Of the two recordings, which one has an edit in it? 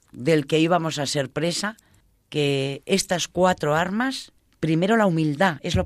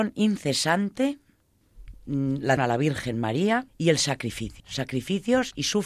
second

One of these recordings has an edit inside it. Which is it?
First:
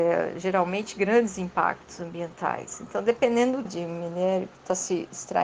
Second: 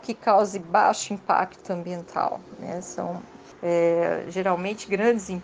first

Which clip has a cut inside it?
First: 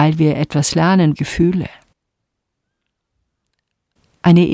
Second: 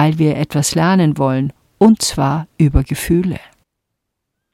first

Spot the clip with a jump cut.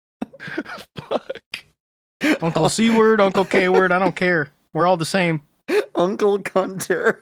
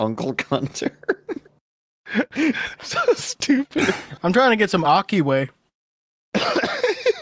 second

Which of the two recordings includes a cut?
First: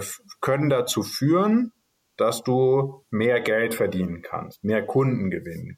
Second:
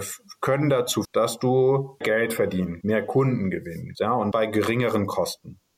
second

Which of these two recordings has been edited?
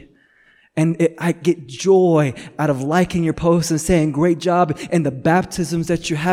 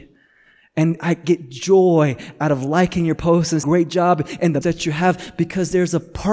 second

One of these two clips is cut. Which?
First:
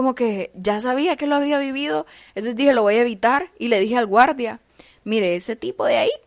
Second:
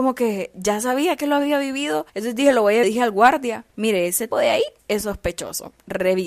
second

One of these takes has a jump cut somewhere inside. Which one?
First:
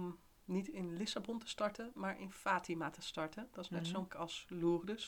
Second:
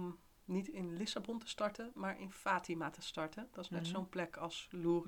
first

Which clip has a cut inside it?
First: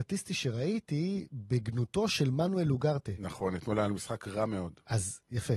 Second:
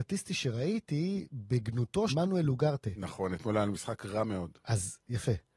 second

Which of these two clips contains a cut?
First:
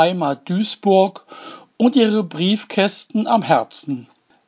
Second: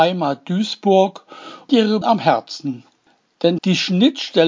second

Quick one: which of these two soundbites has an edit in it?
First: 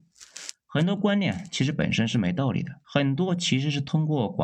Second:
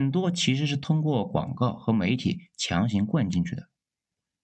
first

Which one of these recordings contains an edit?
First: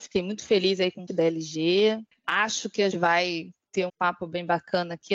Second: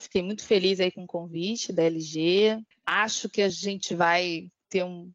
first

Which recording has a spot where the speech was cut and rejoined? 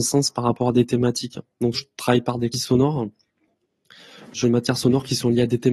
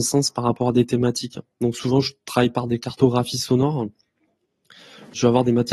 first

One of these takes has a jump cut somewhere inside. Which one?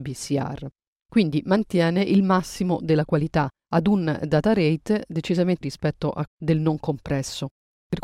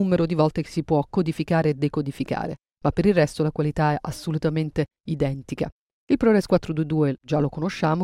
first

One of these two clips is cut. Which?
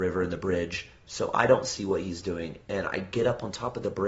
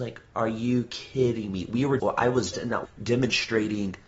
second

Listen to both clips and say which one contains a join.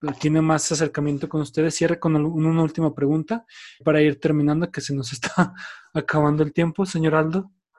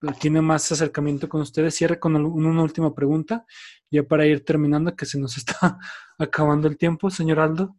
first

